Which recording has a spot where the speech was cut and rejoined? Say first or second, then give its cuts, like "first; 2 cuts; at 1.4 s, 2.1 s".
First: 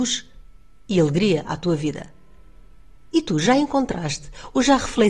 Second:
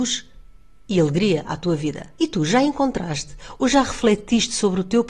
second; 1 cut; at 2.2 s